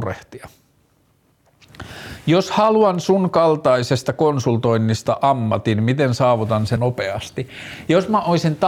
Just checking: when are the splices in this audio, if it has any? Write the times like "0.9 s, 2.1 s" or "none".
6.8 s